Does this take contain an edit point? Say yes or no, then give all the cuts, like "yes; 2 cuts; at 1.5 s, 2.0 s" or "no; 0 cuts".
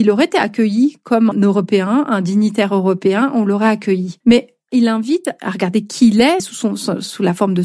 yes; 3 cuts; at 1.3 s, 4.2 s, 6.4 s